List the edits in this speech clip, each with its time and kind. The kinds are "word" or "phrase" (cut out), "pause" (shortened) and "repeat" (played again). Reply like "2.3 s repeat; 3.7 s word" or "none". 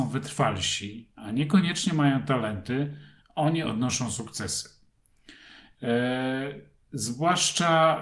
none